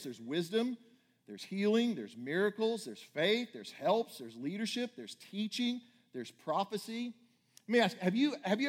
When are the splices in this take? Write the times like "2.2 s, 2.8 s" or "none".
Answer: none